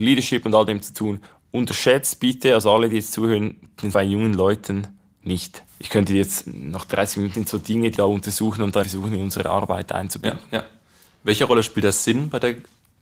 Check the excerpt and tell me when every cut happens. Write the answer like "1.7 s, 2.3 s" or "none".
1.3 s, 3.9 s, 5.7 s, 7.3 s, 8.0 s, 8.8 s